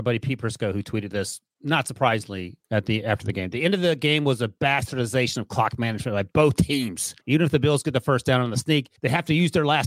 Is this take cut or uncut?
cut